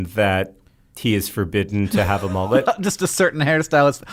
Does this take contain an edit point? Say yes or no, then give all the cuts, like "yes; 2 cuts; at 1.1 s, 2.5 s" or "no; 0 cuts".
no; 0 cuts